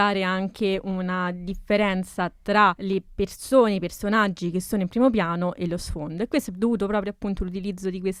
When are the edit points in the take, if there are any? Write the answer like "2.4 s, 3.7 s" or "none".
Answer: none